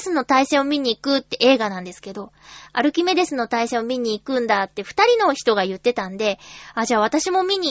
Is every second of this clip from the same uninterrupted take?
yes; 0 cuts

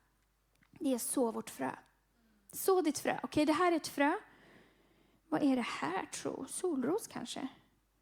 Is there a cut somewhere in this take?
no; 0 cuts

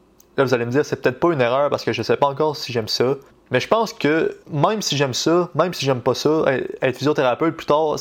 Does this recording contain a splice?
yes; 2 cuts; at 3.3 s, 4.4 s

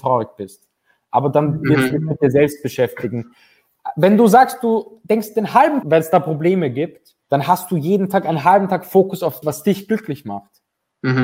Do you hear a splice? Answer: yes; 3 cuts; at 5.8 s, 7.2 s, 9.4 s

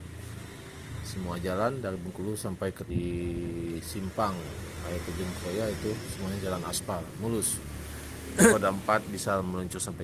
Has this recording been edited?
yes; 2 cuts; at 2.9 s, 8.5 s

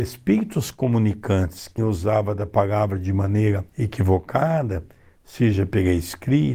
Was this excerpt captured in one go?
no; 2 cuts; at 1.8 s, 3.7 s

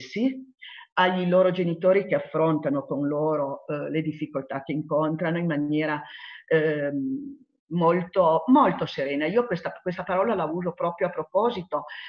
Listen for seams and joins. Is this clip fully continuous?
yes; 0 cuts

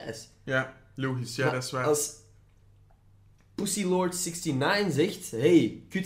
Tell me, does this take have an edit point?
no; 0 cuts

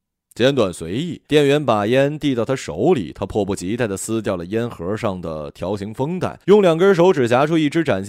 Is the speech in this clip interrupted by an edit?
yes; 2 cuts; at 1.2 s, 6.4 s

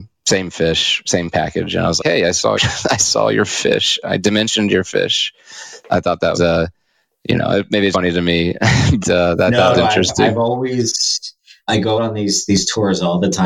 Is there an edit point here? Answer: yes; 8 cuts; at 2.0 s, 2.6 s, 5.8 s, 6.3 s, 7.9 s, 9.0 s, 9.7 s, 12.0 s

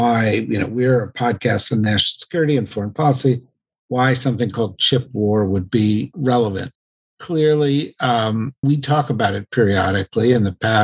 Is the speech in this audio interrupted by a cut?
no; 0 cuts

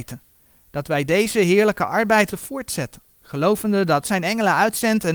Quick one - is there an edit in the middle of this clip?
yes; 3 cuts; at 2.3 s, 3.1 s, 4.0 s

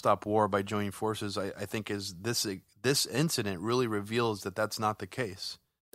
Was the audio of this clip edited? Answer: no; 0 cuts

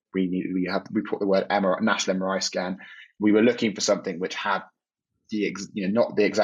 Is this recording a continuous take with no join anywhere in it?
yes; 0 cuts

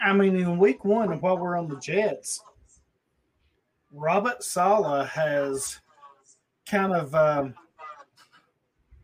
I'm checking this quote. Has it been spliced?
no; 0 cuts

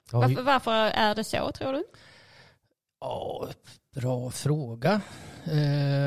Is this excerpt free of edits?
yes; 0 cuts

